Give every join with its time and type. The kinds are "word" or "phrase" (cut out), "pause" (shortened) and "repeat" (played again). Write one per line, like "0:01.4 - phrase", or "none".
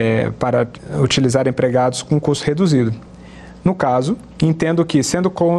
0:04.3 - pause